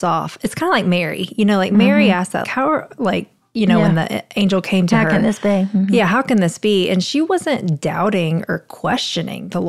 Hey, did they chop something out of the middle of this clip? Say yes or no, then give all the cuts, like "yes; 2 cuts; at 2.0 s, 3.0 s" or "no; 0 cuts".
yes; 1 cut; at 2.4 s